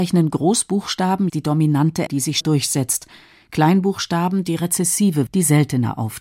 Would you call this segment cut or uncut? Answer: cut